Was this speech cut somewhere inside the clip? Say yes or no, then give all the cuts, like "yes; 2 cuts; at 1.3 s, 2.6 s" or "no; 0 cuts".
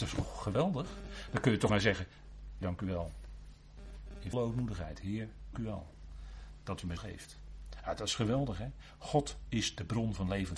yes; 5 cuts; at 1.7 s, 2.6 s, 4.3 s, 5.5 s, 7.0 s